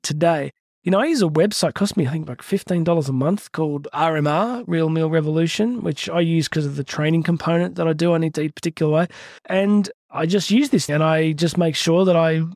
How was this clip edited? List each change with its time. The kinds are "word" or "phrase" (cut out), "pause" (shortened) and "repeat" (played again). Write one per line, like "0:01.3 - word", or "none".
0:09.4 - pause
0:10.9 - word